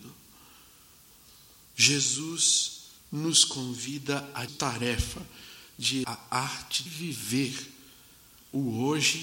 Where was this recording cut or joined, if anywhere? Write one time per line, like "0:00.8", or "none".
0:03.0
0:04.5
0:06.0
0:06.9